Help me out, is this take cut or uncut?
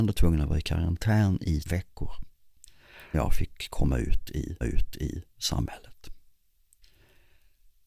cut